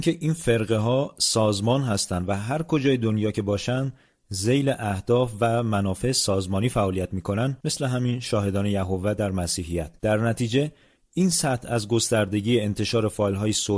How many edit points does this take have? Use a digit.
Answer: 2